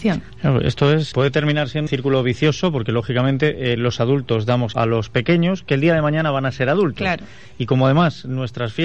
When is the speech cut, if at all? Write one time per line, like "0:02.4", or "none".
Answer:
0:01.1
0:01.9
0:04.7